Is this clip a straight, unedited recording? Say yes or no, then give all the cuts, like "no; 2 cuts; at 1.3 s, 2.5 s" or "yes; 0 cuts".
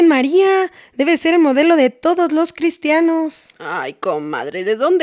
yes; 0 cuts